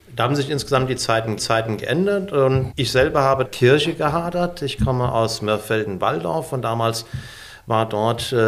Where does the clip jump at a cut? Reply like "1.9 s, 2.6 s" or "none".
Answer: 1.4 s, 2.7 s, 3.4 s